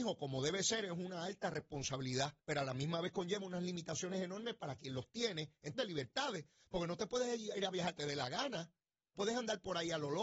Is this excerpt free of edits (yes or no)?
no